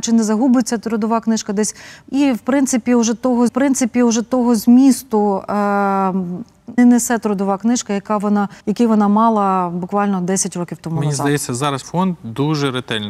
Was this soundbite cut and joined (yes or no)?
yes